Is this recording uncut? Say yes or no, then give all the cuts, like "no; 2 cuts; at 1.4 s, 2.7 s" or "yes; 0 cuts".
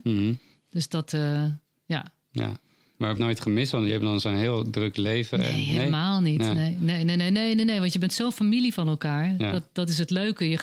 no; 1 cut; at 3.2 s